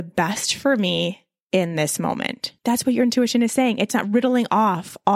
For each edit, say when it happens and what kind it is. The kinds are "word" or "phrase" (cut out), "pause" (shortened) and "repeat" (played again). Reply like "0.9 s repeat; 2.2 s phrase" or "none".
2.6 s pause